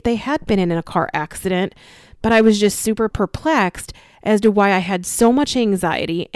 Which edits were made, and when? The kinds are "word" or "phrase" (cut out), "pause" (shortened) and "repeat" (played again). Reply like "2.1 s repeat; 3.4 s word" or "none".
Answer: none